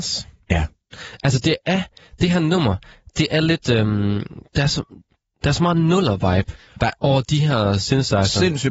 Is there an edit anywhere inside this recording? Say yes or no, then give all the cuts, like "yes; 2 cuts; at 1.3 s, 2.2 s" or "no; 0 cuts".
no; 0 cuts